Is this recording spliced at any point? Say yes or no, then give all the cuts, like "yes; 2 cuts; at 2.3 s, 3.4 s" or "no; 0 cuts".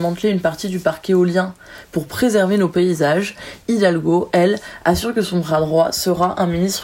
no; 0 cuts